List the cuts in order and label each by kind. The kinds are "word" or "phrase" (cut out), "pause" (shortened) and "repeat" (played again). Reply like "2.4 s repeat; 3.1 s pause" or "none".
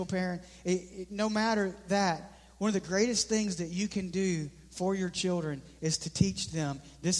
none

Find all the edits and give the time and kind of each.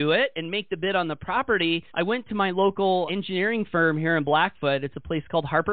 1.9 s pause; 3.1 s word

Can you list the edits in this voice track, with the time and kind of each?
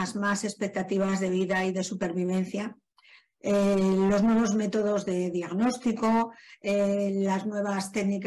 none

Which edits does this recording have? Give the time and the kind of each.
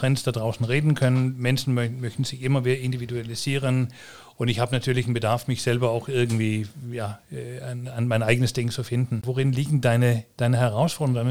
none

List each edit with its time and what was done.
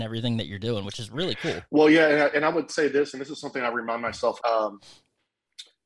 1.7 s pause; 2.7 s phrase; 4.4 s phrase

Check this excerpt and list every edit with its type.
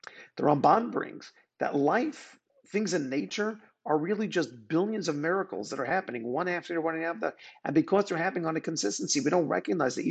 none

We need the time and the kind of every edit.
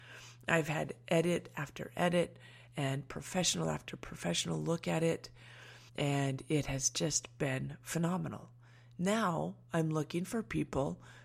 5.9 s pause

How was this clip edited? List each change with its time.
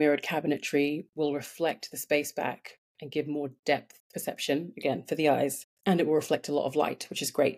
2.9 s pause; 5.8 s pause

